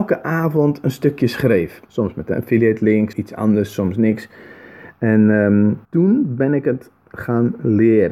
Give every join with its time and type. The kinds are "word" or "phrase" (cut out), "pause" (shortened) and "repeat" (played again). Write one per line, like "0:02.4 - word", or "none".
0:01.9 - pause
0:03.1 - word
0:05.8 - pause